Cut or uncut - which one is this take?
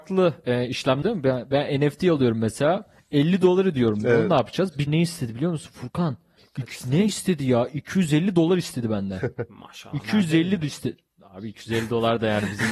cut